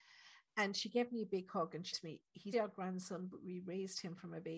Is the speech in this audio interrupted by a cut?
yes; 2 cuts; at 1.9 s, 2.5 s

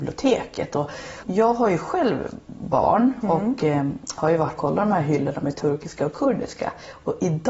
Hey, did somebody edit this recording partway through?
yes; 2 cuts; at 1.2 s, 4.6 s

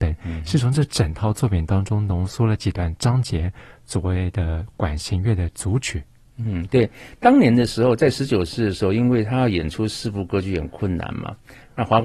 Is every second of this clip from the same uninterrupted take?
yes; 0 cuts

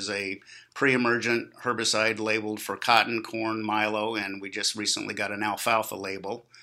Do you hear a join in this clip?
no; 0 cuts

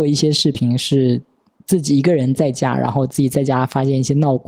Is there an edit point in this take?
no; 0 cuts

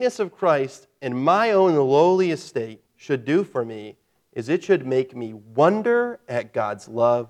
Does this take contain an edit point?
yes; 1 cut; at 2.9 s

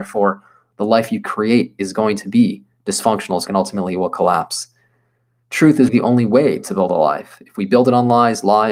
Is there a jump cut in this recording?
yes; 2 cuts; at 3.5 s, 5.9 s

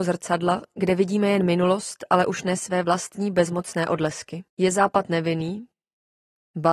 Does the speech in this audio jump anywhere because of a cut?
yes; 1 cut; at 4.5 s

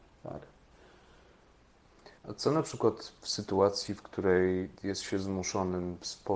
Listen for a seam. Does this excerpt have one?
yes; 2 cuts; at 2.2 s, 4.8 s

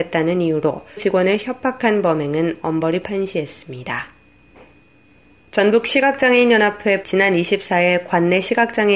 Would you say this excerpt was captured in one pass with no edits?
no; 3 cuts; at 1.0 s, 3.0 s, 7.0 s

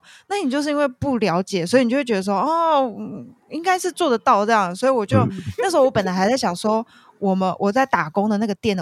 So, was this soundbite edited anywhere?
no; 0 cuts

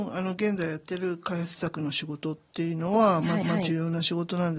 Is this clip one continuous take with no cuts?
no; 1 cut; at 3.4 s

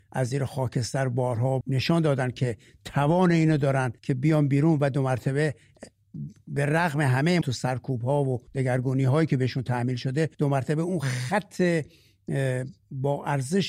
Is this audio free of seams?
no; 5 cuts; at 1.6 s, 4.0 s, 7.4 s, 8.5 s, 10.3 s

